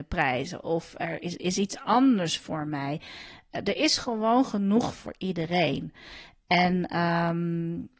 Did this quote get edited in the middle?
no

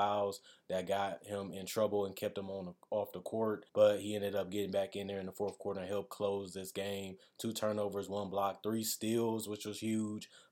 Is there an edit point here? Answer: yes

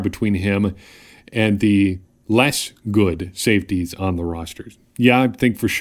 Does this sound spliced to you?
no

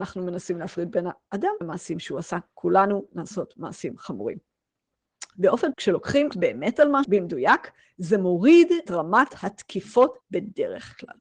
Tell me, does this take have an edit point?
yes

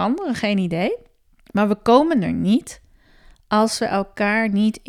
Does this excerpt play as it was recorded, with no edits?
no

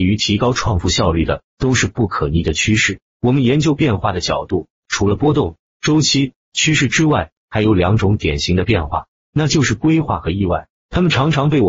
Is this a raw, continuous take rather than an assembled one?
no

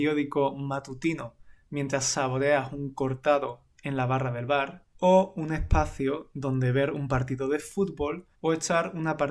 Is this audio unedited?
no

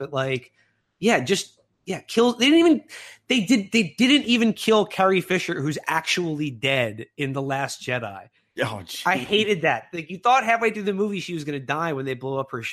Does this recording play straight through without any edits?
yes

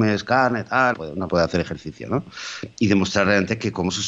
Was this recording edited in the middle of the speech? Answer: yes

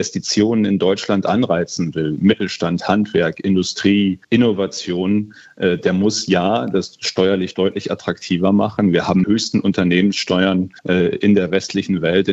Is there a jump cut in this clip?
yes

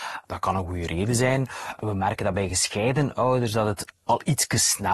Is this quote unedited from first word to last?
yes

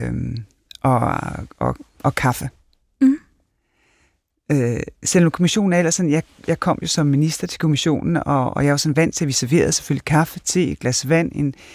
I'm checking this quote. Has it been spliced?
no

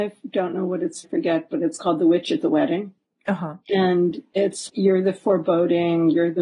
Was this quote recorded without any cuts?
no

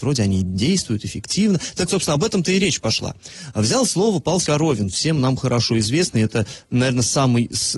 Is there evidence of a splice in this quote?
yes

